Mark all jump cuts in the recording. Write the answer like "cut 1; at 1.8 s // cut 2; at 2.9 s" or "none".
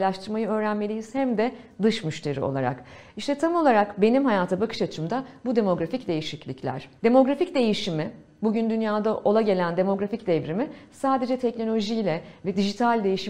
cut 1; at 7.0 s